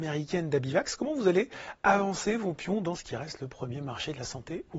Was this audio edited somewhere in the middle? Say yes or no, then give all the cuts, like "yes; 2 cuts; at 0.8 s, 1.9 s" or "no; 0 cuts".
no; 0 cuts